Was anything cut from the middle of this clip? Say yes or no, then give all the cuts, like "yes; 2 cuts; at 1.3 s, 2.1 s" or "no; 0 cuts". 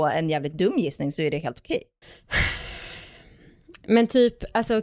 yes; 1 cut; at 2.0 s